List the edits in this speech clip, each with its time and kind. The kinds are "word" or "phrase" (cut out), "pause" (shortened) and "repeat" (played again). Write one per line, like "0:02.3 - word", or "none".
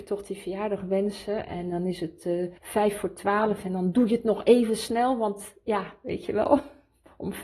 0:02.6 - pause